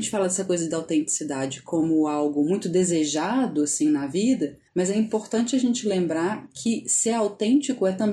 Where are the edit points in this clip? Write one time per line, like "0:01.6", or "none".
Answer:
0:04.7